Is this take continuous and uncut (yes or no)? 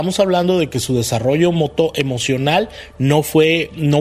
yes